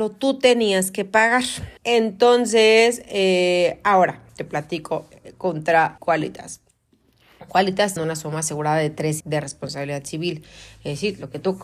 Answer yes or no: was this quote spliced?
yes